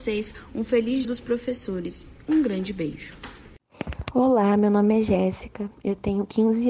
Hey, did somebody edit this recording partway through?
yes; 1 cut; at 1.0 s

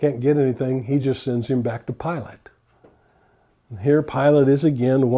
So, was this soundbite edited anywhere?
no; 0 cuts

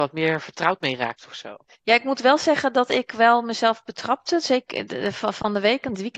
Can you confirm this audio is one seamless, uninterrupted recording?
yes; 0 cuts

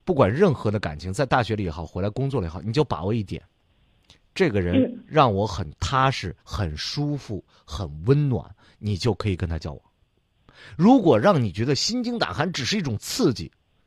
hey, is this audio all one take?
no; 1 cut; at 6.4 s

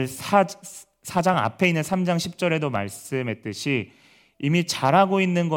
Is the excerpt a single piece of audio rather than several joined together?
yes; 0 cuts

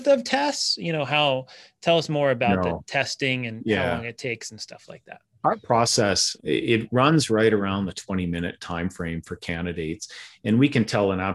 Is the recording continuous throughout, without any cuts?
no; 1 cut; at 6.4 s

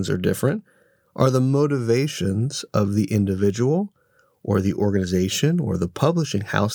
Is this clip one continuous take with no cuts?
yes; 0 cuts

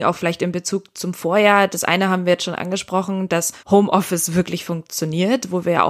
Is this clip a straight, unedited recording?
no; 1 cut; at 3.6 s

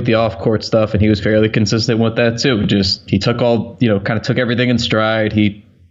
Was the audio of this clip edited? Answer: no; 0 cuts

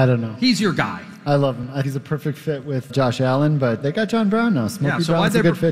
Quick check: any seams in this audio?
yes; 3 cuts; at 1.8 s, 2.9 s, 3.8 s

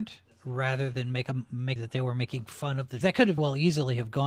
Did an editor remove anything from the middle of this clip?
yes; 3 cuts; at 1.8 s, 3.0 s, 3.4 s

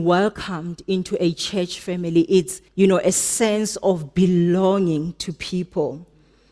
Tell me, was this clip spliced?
yes; 1 cut; at 2.7 s

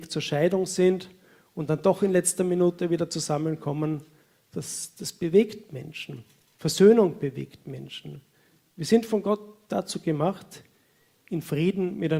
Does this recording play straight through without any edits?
yes; 0 cuts

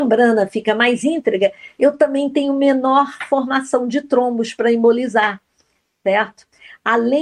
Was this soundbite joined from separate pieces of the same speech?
no; 0 cuts

